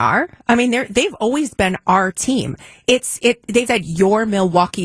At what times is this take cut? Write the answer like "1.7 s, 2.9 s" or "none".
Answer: 3.7 s